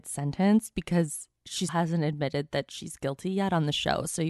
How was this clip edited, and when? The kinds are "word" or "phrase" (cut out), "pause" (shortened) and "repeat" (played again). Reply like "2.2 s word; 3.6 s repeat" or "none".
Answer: 1.7 s word